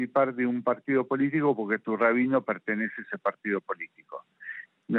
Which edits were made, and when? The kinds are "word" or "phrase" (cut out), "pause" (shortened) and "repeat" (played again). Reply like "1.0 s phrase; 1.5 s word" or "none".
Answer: none

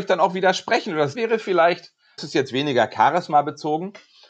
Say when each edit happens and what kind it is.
1.1 s word; 2.2 s word

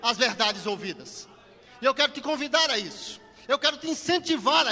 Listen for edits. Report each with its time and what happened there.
none

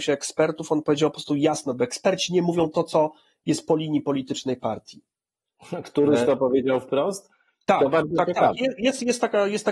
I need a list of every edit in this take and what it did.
none

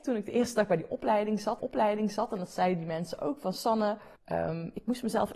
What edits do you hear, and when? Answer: 1.6 s repeat; 4.2 s pause

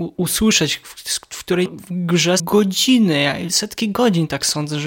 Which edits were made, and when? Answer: 1.7 s word; 2.4 s word; 3.5 s word

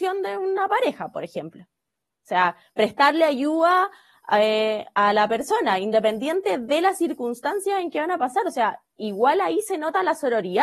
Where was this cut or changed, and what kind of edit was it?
none

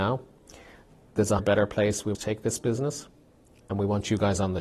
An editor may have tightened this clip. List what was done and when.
1.4 s word; 2.1 s word

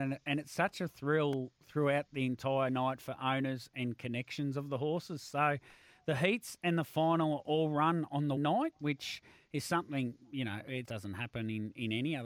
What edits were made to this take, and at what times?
8.4 s word; 10.9 s word

